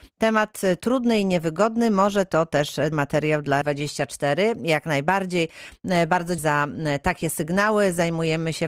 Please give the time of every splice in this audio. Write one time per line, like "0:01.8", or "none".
0:02.9
0:03.6
0:06.4